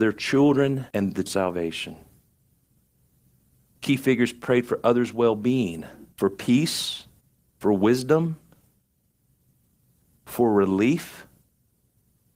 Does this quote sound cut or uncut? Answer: cut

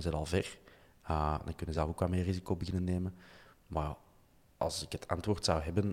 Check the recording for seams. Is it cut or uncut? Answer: uncut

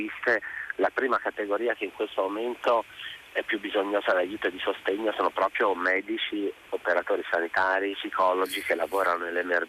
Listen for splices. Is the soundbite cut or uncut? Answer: cut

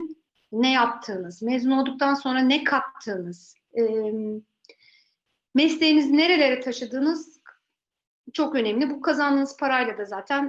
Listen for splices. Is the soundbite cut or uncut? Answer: uncut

